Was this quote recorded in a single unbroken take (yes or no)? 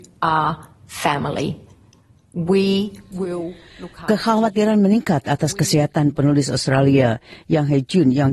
yes